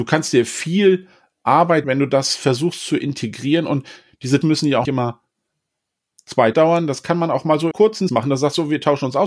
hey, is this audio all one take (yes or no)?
no